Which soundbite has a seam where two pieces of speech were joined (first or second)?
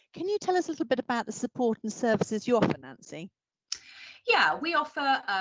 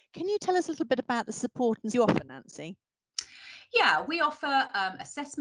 second